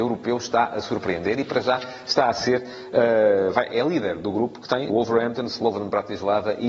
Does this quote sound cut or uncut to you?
cut